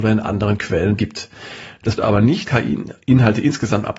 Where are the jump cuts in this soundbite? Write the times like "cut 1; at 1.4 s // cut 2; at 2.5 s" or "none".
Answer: cut 1; at 1.0 s // cut 2; at 2.0 s // cut 3; at 2.4 s